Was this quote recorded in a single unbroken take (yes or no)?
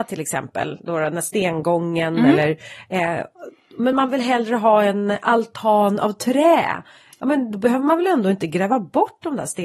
yes